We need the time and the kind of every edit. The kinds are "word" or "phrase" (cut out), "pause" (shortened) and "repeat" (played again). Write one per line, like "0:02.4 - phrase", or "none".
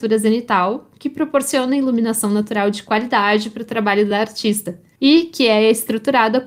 none